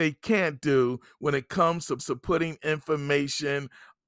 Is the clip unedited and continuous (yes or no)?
no